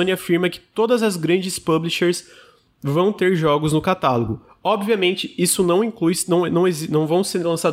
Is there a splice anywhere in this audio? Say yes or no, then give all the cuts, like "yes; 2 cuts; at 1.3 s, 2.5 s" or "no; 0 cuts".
no; 0 cuts